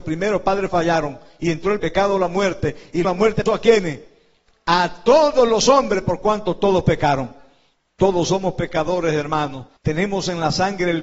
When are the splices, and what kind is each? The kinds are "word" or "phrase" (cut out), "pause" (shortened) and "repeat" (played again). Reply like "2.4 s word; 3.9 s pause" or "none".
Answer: 1.8 s phrase; 3.0 s word; 3.5 s word; 9.8 s pause